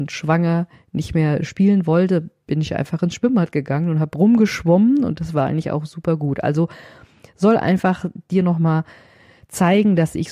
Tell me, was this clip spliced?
no; 0 cuts

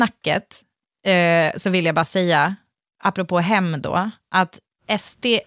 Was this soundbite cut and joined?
no; 0 cuts

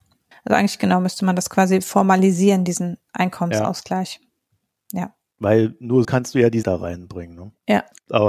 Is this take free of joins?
no; 2 cuts; at 6.0 s, 6.6 s

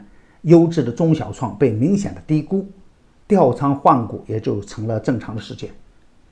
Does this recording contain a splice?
no; 0 cuts

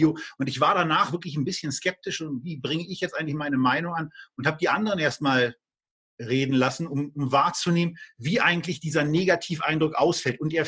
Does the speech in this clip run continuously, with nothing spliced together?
yes; 0 cuts

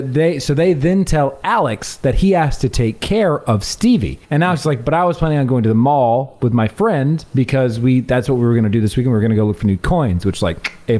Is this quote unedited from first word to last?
no; 1 cut; at 4.2 s

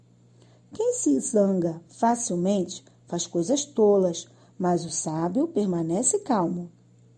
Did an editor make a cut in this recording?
no; 0 cuts

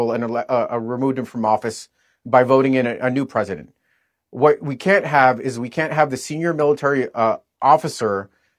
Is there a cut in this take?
no; 0 cuts

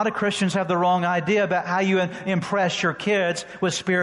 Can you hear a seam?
no; 0 cuts

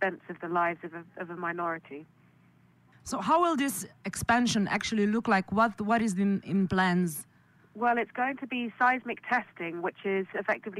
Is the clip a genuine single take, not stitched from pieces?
yes; 0 cuts

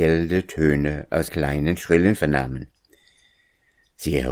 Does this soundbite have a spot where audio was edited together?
yes; 2 cuts; at 1.3 s, 2.2 s

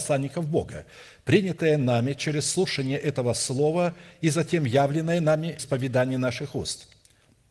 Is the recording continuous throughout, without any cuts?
no; 1 cut; at 5.6 s

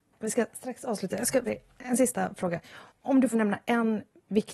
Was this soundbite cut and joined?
yes; 3 cuts; at 1.5 s, 2.9 s, 3.3 s

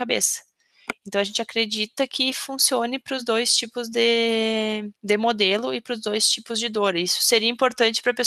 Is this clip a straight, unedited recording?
yes; 0 cuts

